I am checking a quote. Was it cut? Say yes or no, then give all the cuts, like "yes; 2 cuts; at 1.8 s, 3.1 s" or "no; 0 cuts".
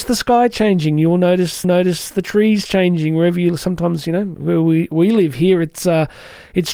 yes; 1 cut; at 1.6 s